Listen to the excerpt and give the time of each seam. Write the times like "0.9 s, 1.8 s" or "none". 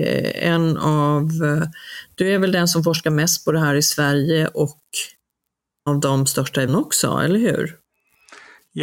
5.9 s, 6.7 s